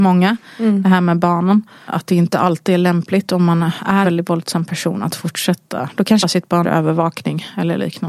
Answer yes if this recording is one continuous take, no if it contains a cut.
no